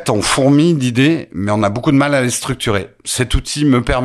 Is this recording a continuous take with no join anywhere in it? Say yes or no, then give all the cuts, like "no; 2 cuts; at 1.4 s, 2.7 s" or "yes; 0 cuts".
yes; 0 cuts